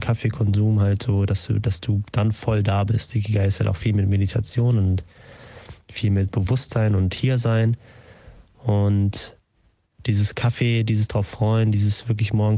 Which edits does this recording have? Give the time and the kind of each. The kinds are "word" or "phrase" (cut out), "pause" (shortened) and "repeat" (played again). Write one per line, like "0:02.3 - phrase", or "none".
none